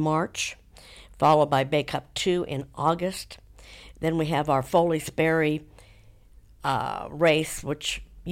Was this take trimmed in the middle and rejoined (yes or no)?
no